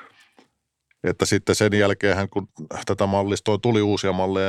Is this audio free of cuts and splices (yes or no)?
yes